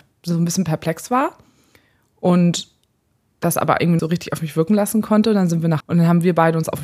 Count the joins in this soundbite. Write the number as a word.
two